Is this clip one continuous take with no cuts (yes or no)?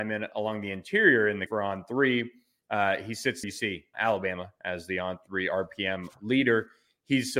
no